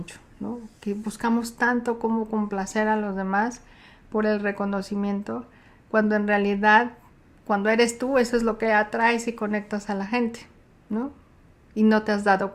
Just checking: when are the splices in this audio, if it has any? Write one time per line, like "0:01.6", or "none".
none